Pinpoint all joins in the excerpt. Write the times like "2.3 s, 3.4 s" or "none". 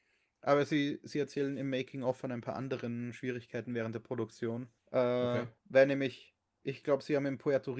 4.8 s, 5.6 s